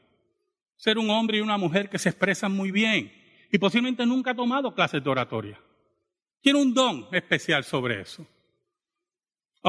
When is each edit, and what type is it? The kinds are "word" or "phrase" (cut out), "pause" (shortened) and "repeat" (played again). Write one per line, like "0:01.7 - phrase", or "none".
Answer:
none